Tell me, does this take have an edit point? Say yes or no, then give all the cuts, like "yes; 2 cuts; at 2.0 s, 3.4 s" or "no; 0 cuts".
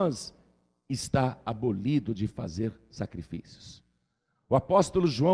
no; 0 cuts